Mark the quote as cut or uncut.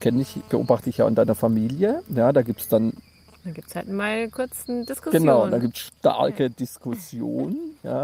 uncut